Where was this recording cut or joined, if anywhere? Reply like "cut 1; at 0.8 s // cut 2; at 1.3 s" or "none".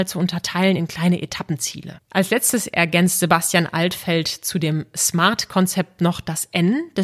cut 1; at 2.0 s

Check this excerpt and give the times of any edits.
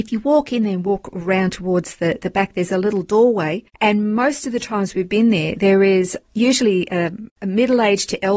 cut 1; at 3.7 s // cut 2; at 7.3 s

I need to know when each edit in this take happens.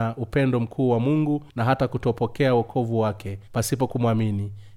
cut 1; at 1.5 s // cut 2; at 3.5 s

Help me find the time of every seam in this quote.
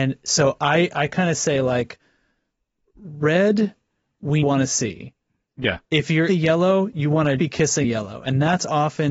cut 1; at 4.4 s // cut 2; at 6.3 s // cut 3; at 7.4 s // cut 4; at 7.8 s

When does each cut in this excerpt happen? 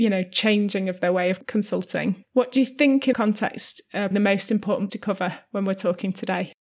cut 1; at 3.1 s // cut 2; at 4.1 s // cut 3; at 4.9 s

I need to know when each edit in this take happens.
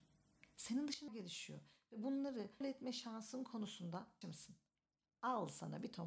cut 1; at 1.1 s // cut 2; at 2.6 s // cut 3; at 4.2 s

